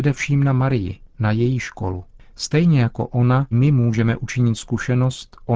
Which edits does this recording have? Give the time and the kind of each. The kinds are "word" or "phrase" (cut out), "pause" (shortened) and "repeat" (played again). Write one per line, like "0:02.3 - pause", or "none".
0:03.5 - word